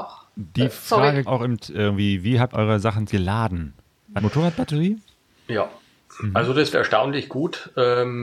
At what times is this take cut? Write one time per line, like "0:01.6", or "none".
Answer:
0:01.3
0:01.6
0:02.5
0:03.1
0:04.2
0:06.7